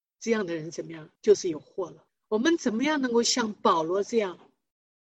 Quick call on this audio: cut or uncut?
cut